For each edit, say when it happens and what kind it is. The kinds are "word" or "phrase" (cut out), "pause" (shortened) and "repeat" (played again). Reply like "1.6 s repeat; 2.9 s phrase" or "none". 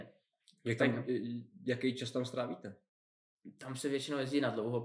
none